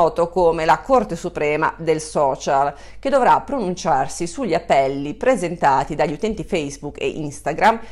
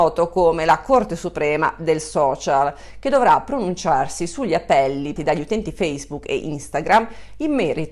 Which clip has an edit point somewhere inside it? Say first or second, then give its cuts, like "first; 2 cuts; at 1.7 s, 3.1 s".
second; 1 cut; at 5.2 s